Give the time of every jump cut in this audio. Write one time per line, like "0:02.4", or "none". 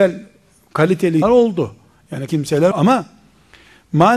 0:01.2
0:02.3
0:02.7